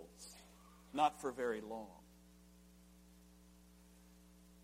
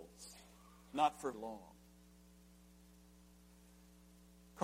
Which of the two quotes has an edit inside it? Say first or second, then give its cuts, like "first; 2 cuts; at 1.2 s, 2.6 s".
second; 1 cut; at 1.3 s